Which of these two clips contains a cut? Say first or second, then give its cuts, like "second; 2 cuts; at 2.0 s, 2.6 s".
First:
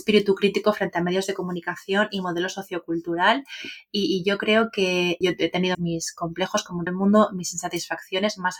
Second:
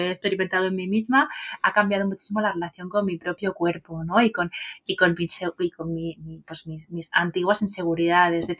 first; 3 cuts; at 5.2 s, 5.7 s, 6.9 s